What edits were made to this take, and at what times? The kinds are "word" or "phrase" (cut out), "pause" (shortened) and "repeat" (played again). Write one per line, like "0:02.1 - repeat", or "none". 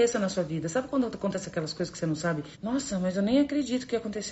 0:02.5 - pause